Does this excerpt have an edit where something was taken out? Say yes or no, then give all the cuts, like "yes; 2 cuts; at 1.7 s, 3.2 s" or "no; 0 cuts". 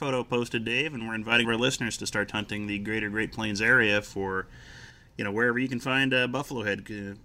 yes; 1 cut; at 1.4 s